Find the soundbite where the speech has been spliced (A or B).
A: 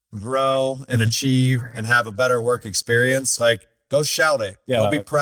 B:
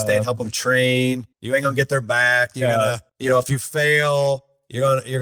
B